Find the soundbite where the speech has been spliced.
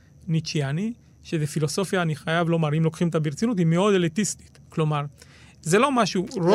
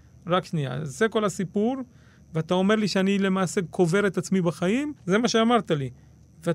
second; 1 cut; at 5.0 s

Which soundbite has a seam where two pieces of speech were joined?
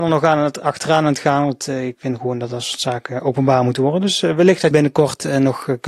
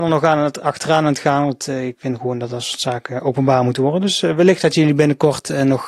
first; 1 cut; at 4.7 s

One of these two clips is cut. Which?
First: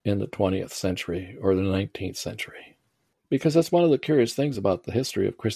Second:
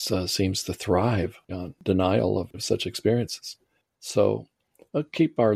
second; 2 cuts; at 1.5 s, 2.5 s

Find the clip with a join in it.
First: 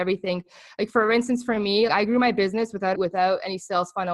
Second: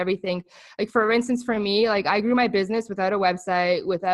first; 2 cuts; at 1.9 s, 2.9 s

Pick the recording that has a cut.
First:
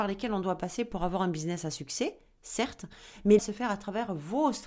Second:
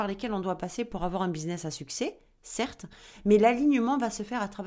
first; 1 cut; at 3.4 s

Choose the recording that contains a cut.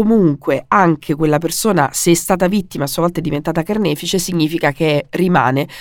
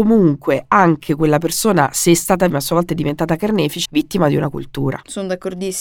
second; 2 cuts; at 2.5 s, 3.8 s

